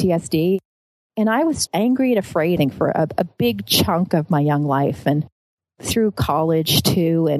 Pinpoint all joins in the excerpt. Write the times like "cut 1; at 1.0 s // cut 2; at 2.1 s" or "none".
cut 1; at 1.7 s // cut 2; at 2.6 s